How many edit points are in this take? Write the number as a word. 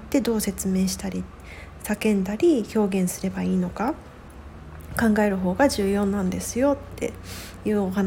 zero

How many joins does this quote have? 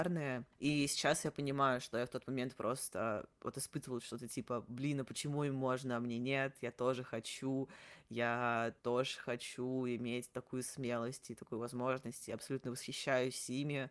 one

